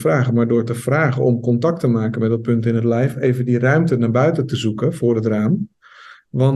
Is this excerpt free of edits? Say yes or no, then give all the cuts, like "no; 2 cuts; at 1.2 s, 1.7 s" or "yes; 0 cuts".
yes; 0 cuts